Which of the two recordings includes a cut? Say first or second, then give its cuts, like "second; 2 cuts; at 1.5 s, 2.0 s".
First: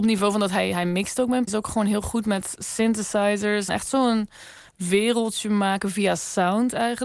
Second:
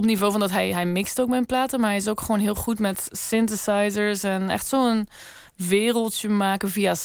first; 2 cuts; at 1.5 s, 3.7 s